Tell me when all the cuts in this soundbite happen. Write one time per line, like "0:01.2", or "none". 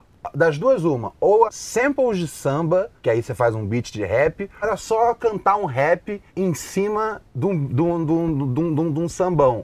0:01.5
0:03.0
0:04.6
0:06.3
0:07.3

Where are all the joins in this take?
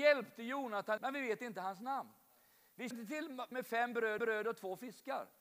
0:01.0
0:02.9
0:03.5
0:04.2

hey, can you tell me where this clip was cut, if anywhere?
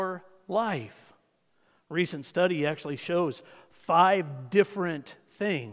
none

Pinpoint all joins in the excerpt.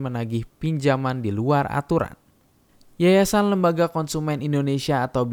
none

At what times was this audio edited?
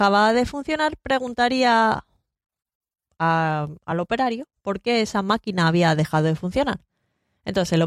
none

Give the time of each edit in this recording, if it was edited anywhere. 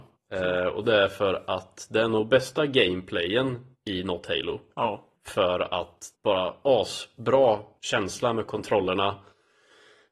0:05.2
0:06.1

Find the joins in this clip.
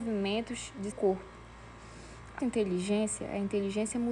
0:00.9
0:02.4

